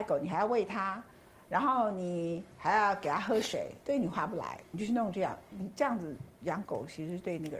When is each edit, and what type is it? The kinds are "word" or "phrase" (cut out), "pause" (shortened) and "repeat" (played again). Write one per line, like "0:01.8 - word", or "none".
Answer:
0:03.8 - pause